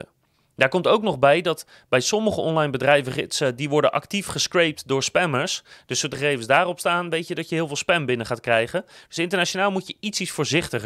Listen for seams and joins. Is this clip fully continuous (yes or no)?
no